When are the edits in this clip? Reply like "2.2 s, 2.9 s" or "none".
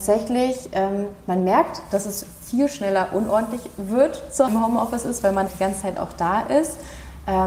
4.5 s, 5.5 s